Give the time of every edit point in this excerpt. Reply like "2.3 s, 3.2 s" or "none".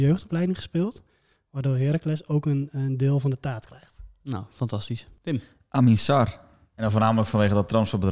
none